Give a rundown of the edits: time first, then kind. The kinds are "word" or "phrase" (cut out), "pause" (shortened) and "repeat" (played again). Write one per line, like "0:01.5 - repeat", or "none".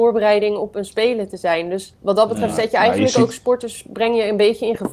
0:02.0 - pause